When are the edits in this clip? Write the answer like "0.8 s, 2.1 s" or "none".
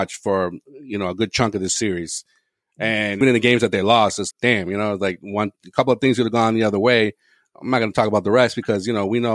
3.2 s, 4.3 s